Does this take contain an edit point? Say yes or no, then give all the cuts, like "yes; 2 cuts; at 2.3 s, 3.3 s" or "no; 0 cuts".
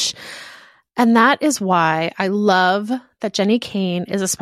no; 0 cuts